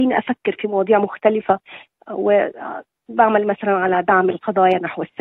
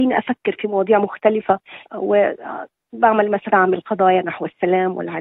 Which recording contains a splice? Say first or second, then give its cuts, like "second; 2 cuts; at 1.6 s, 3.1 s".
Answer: second; 2 cuts; at 1.8 s, 3.5 s